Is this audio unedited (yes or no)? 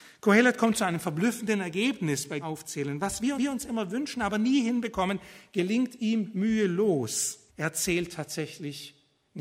no